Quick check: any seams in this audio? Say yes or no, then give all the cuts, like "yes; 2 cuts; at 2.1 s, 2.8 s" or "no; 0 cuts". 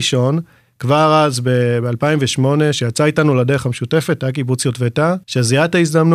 yes; 1 cut; at 5.2 s